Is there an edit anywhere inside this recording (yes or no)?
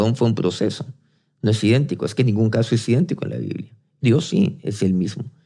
no